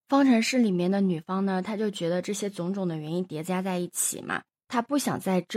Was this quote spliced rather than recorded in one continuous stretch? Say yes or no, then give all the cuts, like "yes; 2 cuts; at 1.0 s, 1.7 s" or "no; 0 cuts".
no; 0 cuts